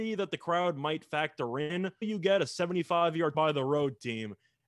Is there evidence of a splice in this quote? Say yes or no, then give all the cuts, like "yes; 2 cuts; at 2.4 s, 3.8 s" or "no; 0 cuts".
yes; 2 cuts; at 2.0 s, 3.3 s